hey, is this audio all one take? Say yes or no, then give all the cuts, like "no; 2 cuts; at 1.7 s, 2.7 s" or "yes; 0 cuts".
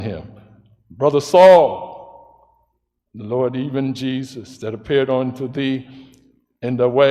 yes; 0 cuts